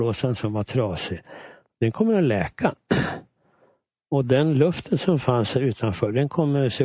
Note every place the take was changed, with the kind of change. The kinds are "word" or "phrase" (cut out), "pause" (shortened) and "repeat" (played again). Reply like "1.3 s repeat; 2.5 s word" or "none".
none